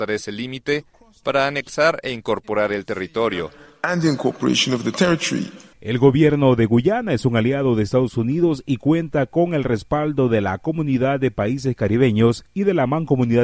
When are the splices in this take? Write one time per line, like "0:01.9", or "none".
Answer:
none